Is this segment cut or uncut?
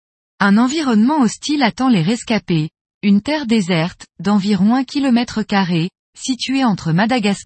uncut